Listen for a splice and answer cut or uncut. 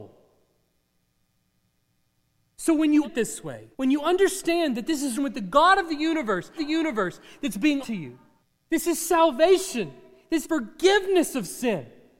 cut